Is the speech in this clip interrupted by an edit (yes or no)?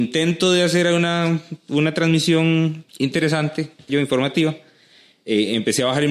yes